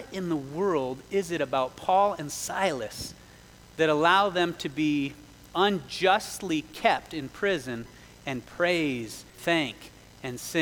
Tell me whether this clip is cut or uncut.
cut